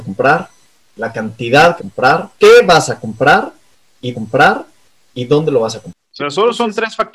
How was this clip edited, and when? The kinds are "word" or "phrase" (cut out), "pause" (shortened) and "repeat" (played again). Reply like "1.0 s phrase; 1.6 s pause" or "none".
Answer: 1.8 s phrase; 2.3 s pause; 4.1 s repeat; 6.2 s word